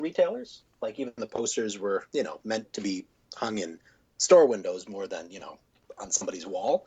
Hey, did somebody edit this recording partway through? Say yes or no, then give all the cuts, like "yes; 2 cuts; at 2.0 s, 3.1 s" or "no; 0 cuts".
no; 0 cuts